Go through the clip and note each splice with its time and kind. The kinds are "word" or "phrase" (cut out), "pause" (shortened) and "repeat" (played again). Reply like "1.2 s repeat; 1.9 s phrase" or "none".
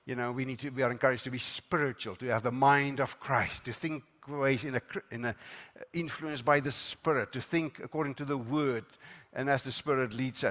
none